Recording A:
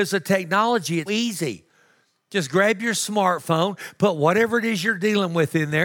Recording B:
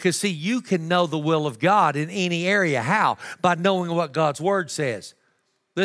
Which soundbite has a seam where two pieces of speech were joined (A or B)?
A